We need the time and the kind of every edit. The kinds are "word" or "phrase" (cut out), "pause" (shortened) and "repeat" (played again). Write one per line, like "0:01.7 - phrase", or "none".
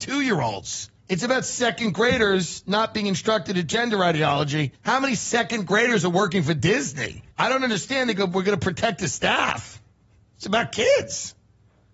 0:01.0 - pause
0:04.8 - pause
0:07.3 - pause